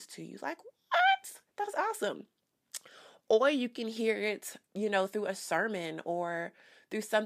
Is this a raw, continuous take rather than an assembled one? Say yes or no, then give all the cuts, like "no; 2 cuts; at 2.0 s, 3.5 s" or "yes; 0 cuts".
no; 2 cuts; at 1.5 s, 4.6 s